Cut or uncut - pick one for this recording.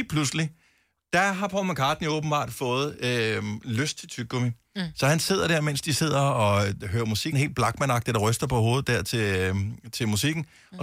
cut